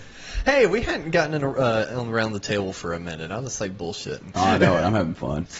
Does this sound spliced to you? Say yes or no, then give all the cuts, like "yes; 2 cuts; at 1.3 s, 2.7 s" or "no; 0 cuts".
no; 0 cuts